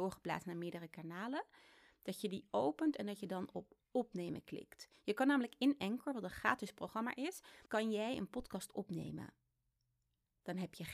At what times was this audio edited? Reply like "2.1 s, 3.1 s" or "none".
none

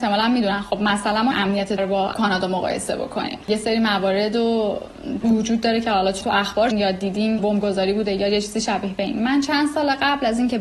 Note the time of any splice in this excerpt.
1.3 s, 1.8 s, 2.1 s, 3.4 s, 5.2 s, 6.2 s, 6.7 s, 7.4 s

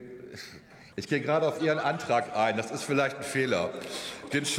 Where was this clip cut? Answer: 0.9 s

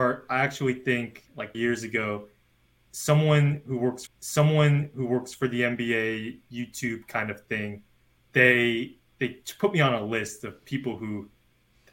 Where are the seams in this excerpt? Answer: 1.5 s, 4.1 s, 8.2 s

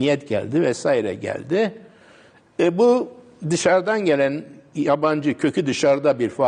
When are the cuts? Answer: none

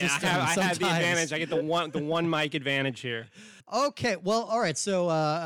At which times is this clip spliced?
3.6 s

